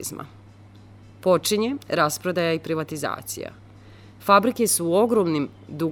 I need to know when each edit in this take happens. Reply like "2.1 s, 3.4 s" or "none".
none